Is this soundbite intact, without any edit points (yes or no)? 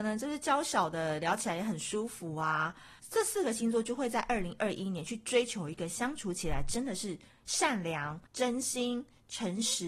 no